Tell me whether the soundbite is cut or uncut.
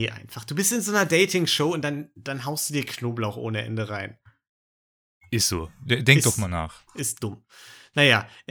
uncut